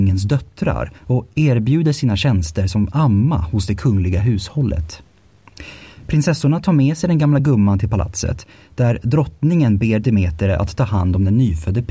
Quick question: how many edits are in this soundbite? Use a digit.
0